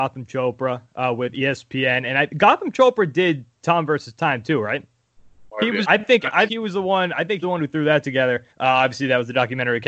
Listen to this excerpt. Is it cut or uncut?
cut